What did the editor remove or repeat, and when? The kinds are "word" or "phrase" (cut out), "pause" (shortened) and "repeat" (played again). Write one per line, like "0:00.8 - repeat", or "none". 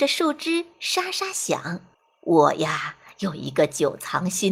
0:01.9 - pause